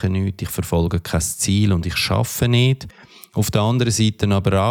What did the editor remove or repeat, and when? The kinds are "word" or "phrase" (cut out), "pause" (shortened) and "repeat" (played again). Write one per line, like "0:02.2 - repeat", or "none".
none